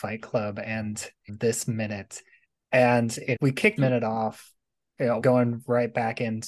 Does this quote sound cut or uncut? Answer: cut